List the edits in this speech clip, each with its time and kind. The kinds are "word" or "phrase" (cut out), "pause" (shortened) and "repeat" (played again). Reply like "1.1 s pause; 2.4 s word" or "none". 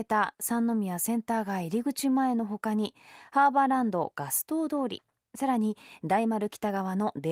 none